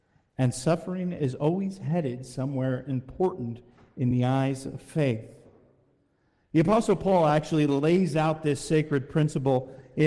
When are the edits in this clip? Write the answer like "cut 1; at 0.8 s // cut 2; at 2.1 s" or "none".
none